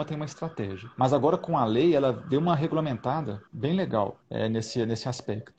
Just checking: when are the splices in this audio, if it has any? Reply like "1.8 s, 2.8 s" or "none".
0.9 s, 3.5 s, 4.2 s